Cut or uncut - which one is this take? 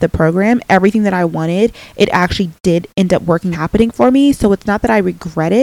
cut